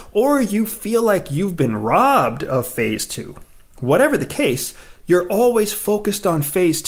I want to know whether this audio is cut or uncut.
uncut